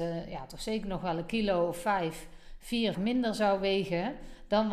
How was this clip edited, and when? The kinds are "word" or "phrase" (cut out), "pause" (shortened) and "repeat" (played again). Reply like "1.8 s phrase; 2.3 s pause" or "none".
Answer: 2.9 s word